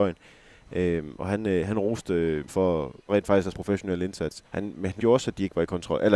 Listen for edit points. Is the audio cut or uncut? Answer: cut